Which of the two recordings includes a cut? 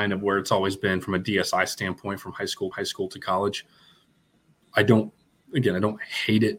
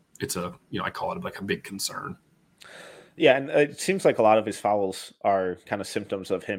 first; 1 cut; at 2.7 s

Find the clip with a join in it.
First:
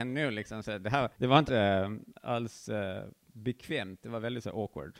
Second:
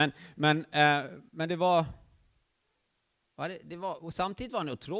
first; 2 cuts; at 1.1 s, 1.5 s

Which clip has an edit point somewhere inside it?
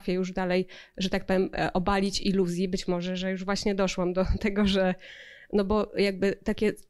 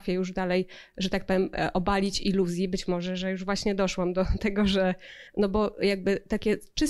second; 1 cut; at 5.3 s

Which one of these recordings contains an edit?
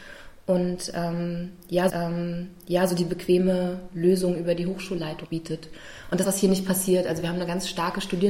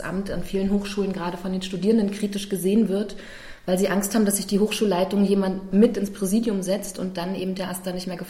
first; 3 cuts; at 1.9 s, 5.2 s, 6.2 s

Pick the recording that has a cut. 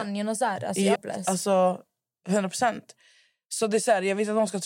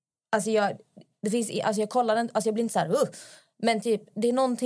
first; 1 cut; at 1.0 s

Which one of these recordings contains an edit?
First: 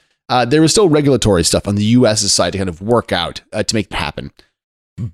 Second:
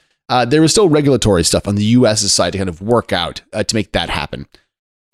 first; 1 cut; at 3.9 s

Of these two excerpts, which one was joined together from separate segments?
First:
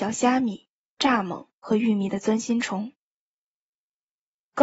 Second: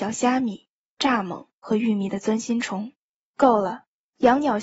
second; 1 cut; at 3.0 s

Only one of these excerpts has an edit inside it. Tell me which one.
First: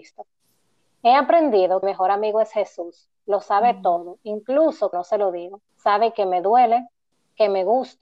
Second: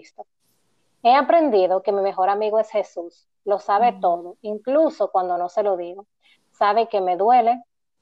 first; 4 cuts; at 1.8 s, 4.9 s, 5.7 s, 7.1 s

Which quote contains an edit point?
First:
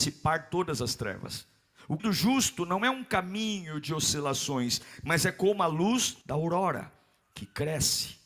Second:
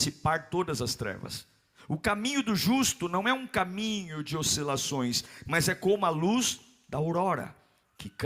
first; 2 cuts; at 2.0 s, 6.2 s

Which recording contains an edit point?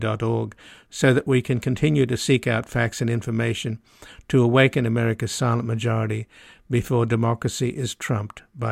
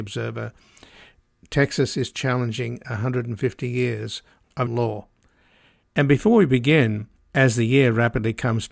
second; 1 cut; at 4.7 s

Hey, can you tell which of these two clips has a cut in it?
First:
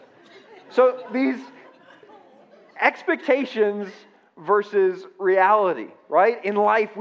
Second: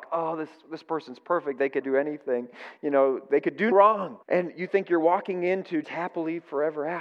second; 4 cuts; at 1.8 s, 3.7 s, 4.2 s, 5.8 s

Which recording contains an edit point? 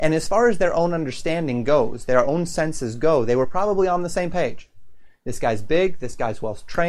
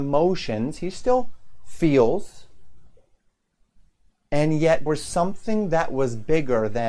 second; 1 cut; at 4.9 s

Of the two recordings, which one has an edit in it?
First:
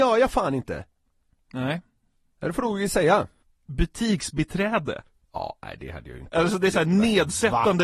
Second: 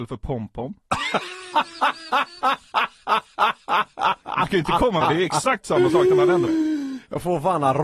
second; 2 cuts; at 5.0 s, 6.5 s

